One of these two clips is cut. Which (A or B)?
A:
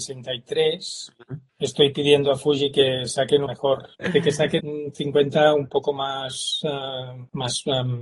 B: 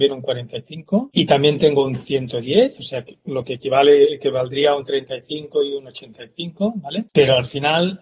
A